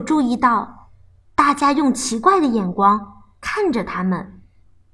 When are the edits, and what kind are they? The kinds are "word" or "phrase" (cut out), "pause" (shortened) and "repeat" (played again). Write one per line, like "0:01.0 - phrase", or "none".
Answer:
none